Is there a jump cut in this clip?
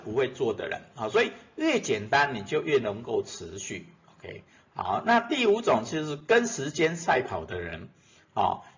no; 0 cuts

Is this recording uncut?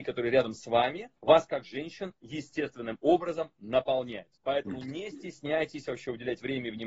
no; 2 cuts; at 1.2 s, 4.3 s

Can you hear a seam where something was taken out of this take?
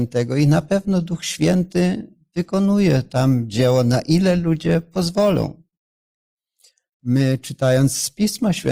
no; 0 cuts

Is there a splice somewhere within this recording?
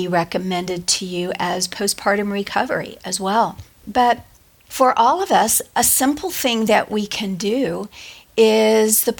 no; 0 cuts

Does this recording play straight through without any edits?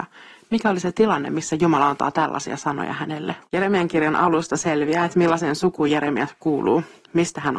no; 1 cut; at 3.4 s

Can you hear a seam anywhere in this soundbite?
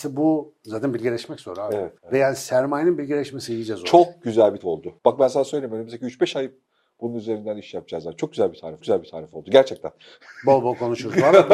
yes; 4 cuts; at 2.0 s, 4.6 s, 5.0 s, 8.8 s

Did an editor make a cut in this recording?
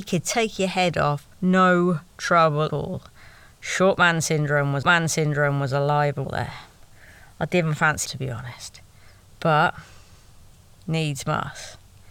yes; 5 cuts; at 1.3 s, 2.7 s, 4.8 s, 6.2 s, 8.1 s

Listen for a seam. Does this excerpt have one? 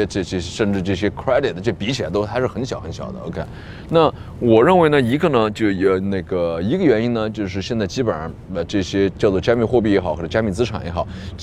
no; 0 cuts

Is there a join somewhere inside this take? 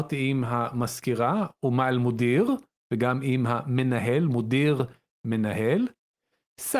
no; 0 cuts

